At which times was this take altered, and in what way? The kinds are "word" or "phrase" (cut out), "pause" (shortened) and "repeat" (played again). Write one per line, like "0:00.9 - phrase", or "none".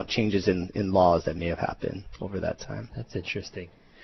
none